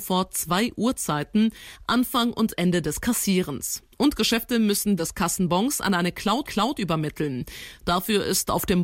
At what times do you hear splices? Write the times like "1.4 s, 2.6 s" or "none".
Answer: 5.0 s, 6.4 s